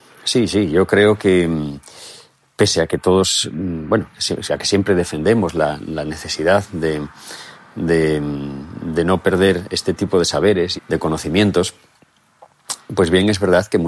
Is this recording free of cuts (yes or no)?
no